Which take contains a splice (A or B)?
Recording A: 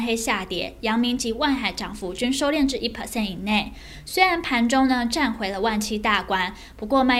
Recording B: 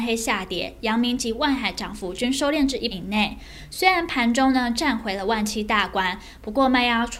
B